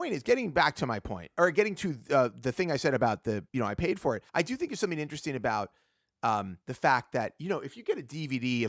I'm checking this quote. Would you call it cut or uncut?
cut